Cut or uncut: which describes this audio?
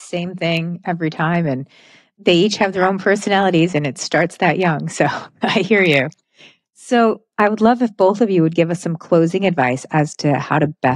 uncut